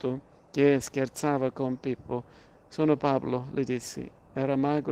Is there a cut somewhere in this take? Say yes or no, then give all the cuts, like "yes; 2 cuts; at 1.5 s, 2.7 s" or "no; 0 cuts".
no; 0 cuts